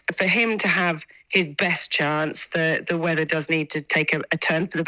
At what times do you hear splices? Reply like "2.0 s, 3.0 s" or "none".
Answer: none